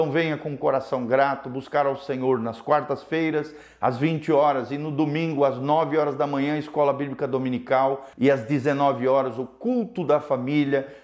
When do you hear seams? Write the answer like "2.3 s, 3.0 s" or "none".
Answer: 8.1 s